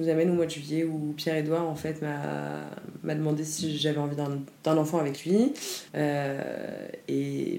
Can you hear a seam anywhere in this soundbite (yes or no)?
yes